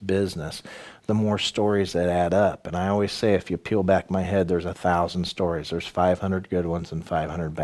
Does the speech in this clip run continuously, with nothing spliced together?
yes; 0 cuts

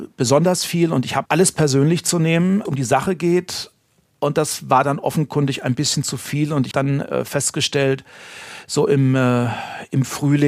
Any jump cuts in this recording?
yes; 3 cuts; at 1.3 s, 2.6 s, 6.7 s

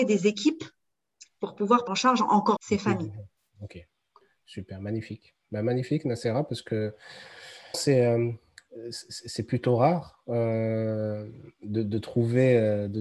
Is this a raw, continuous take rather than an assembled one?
no; 3 cuts; at 1.9 s, 2.6 s, 7.7 s

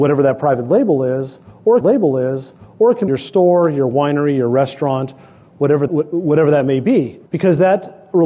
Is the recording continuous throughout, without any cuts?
no; 4 cuts; at 1.8 s, 3.1 s, 5.9 s, 7.3 s

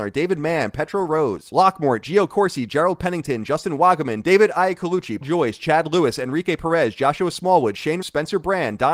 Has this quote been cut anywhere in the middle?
yes; 2 cuts; at 5.2 s, 8.0 s

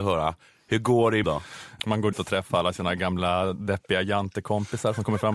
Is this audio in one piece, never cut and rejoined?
no; 2 cuts; at 1.2 s, 2.1 s

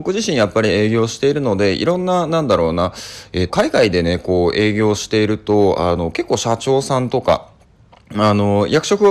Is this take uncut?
no; 1 cut; at 3.5 s

